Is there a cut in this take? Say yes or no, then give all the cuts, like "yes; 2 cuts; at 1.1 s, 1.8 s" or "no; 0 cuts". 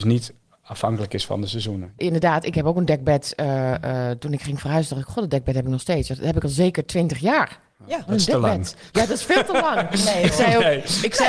no; 0 cuts